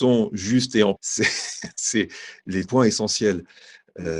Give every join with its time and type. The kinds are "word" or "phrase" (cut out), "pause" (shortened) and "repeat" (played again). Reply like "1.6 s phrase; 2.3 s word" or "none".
1.0 s word; 2.7 s word